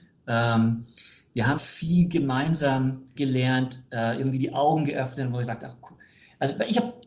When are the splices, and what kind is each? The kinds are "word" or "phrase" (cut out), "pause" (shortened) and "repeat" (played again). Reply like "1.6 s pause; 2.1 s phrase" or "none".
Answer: 1.6 s word; 3.2 s word